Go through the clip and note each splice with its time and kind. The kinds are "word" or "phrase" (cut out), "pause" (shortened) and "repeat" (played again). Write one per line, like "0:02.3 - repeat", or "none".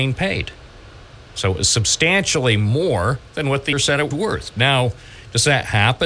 0:03.3 - pause
0:03.7 - word
0:04.1 - word